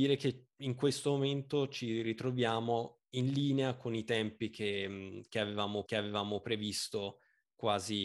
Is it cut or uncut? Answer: cut